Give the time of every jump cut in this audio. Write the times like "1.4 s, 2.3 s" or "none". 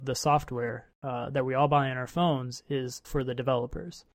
3.0 s